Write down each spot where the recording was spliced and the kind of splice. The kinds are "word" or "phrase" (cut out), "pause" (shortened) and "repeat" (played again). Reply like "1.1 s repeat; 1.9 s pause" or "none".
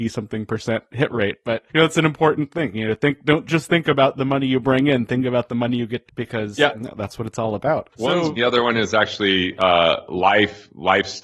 1.7 s pause; 6.1 s phrase; 7.9 s pause; 8.4 s phrase